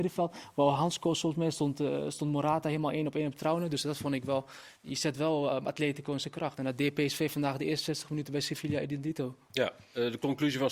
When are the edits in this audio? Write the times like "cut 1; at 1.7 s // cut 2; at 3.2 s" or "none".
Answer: cut 1; at 4.8 s